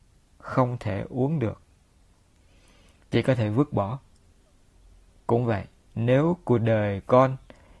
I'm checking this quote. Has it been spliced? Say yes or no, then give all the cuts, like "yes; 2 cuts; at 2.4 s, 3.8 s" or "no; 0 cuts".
no; 0 cuts